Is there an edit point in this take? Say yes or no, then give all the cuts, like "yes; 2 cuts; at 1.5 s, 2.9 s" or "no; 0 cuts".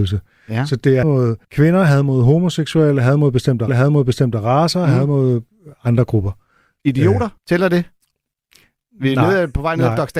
yes; 4 cuts; at 1.0 s, 1.4 s, 3.7 s, 7.4 s